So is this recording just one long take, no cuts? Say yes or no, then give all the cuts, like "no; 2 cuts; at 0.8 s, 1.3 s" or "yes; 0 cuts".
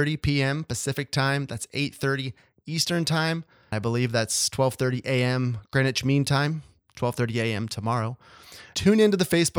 no; 1 cut; at 3.7 s